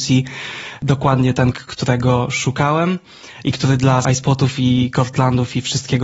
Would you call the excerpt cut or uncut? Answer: cut